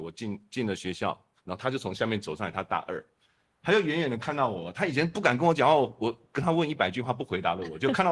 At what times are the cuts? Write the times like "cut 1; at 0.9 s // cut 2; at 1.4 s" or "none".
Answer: none